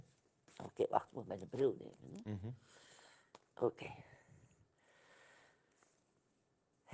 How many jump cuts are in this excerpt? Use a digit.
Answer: 0